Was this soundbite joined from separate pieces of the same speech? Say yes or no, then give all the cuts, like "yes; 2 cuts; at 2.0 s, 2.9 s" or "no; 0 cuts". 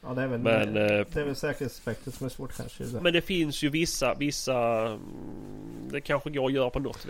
yes; 1 cut; at 3.0 s